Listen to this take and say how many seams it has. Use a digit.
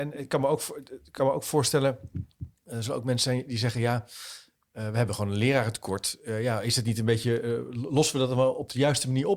1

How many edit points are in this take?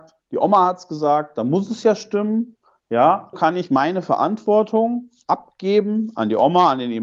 1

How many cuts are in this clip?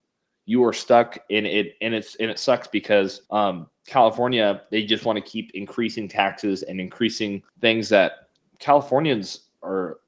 3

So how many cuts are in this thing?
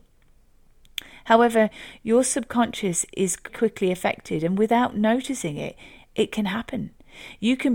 1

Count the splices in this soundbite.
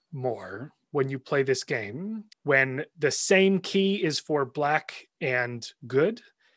1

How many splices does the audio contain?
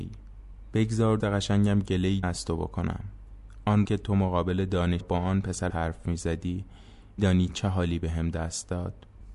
6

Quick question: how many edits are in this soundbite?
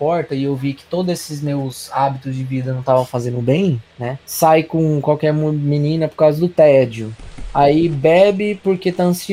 1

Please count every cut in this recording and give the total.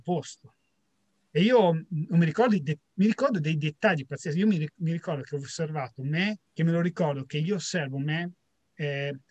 2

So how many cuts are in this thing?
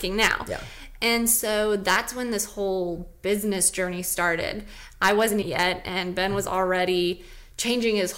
1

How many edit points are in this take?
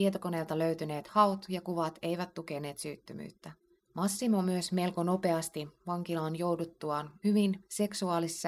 2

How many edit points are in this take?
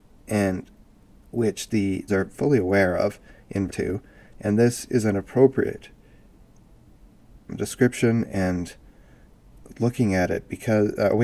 3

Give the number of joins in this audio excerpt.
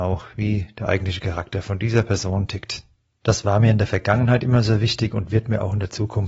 0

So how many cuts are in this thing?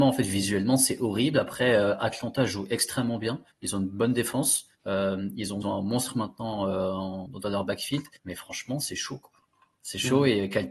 5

